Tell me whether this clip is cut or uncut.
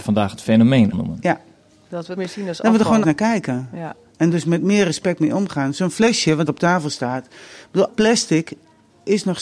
cut